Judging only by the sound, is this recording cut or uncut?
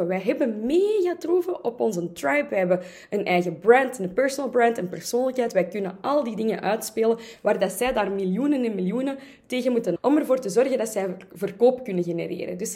cut